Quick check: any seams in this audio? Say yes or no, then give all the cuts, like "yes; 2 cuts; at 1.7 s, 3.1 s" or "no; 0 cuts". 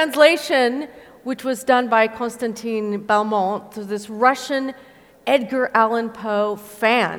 no; 0 cuts